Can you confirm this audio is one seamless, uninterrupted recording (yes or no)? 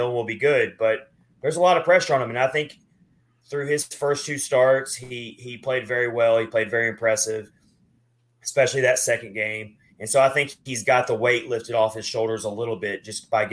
yes